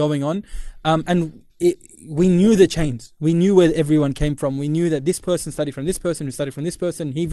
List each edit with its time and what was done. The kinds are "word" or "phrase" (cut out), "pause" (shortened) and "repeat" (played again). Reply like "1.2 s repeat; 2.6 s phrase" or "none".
1.5 s pause

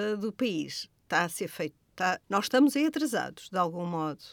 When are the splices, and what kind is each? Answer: 2.2 s pause

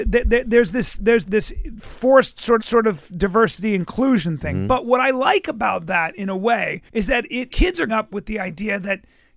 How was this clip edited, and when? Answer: 1.3 s word; 2.6 s repeat; 6.9 s pause; 7.5 s word; 7.9 s word

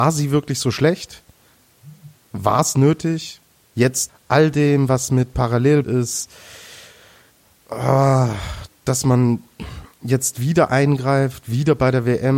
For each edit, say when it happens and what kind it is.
4.1 s word; 5.8 s word

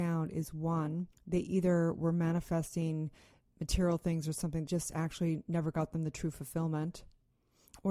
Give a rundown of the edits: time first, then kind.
1.1 s pause; 4.7 s word

